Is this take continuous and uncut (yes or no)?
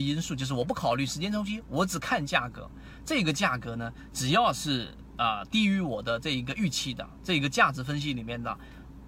yes